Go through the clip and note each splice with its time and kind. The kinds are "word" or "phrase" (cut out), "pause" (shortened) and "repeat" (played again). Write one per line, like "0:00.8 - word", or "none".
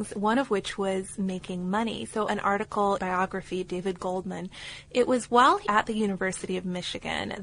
0:02.3 - phrase
0:03.0 - word
0:03.7 - word
0:05.6 - word